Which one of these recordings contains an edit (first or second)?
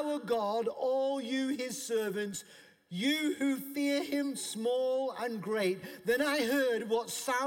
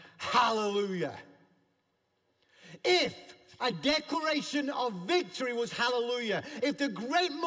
first